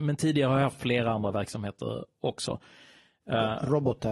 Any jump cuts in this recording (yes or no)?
no